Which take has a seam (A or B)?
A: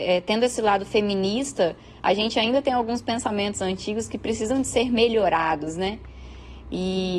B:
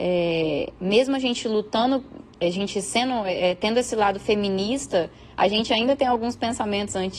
B